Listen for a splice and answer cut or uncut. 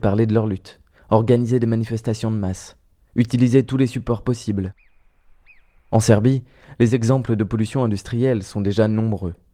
uncut